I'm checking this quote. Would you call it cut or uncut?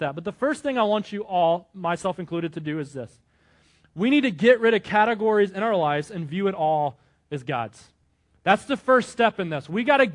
uncut